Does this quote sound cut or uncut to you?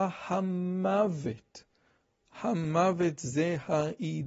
uncut